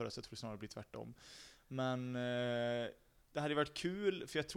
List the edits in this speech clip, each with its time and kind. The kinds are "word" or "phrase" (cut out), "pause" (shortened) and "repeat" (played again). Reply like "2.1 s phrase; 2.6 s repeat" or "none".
3.2 s word